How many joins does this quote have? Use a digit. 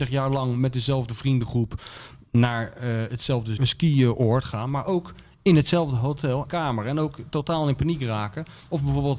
2